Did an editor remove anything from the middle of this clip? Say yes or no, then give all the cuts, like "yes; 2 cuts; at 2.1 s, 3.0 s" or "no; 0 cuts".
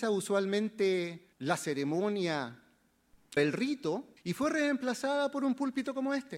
yes; 3 cuts; at 1.3 s, 3.4 s, 4.2 s